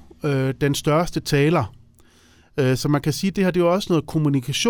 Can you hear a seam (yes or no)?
no